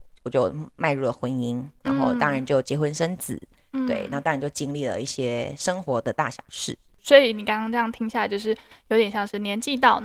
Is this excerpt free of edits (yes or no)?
yes